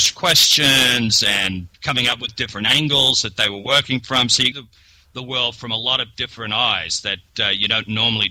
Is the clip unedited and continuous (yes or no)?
no